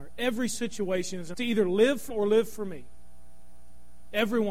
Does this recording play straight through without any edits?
no; 2 cuts; at 1.3 s, 2.1 s

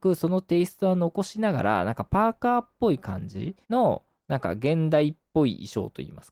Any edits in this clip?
yes; 1 cut; at 3.6 s

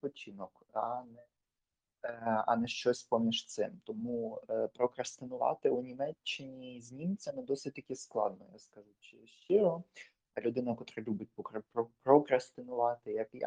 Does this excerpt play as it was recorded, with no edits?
yes; 0 cuts

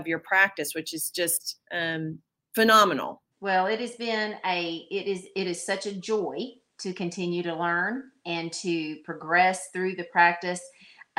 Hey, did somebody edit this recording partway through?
yes; 2 cuts; at 1.6 s, 3.3 s

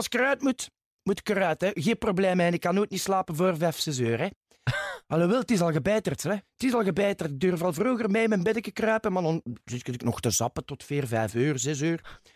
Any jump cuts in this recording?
no; 0 cuts

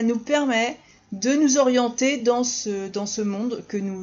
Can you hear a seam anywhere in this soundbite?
no; 0 cuts

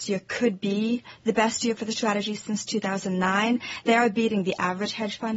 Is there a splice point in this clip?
no; 0 cuts

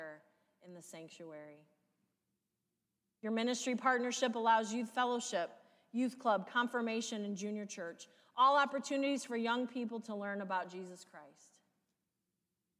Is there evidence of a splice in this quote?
no; 0 cuts

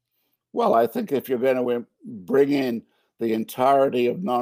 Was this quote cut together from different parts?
no; 0 cuts

